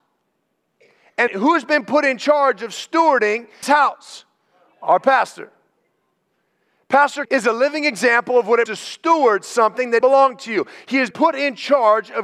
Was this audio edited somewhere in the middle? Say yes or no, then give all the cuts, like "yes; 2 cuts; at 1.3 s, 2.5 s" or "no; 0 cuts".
yes; 6 cuts; at 1.3 s, 3.6 s, 7.2 s, 8.7 s, 10.0 s, 11.1 s